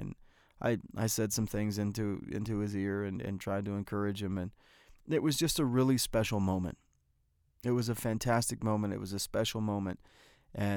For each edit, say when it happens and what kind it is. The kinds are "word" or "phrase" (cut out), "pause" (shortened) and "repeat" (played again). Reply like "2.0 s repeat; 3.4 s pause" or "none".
none